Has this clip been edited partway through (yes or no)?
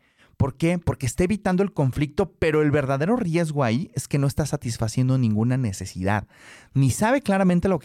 no